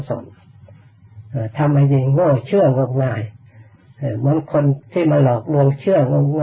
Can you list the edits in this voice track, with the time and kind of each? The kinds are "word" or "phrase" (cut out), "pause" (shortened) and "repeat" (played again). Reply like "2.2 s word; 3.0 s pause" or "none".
4.8 s pause